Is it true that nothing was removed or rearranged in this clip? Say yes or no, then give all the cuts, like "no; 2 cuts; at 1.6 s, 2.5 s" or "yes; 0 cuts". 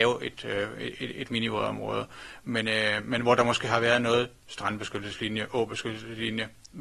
yes; 0 cuts